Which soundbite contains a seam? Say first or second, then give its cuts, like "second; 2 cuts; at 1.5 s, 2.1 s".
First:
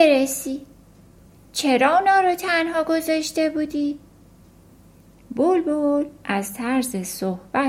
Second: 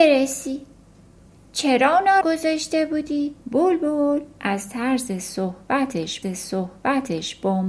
second; 3 cuts; at 2.2 s, 3.4 s, 6.2 s